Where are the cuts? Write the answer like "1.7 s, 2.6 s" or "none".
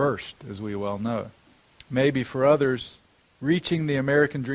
1.6 s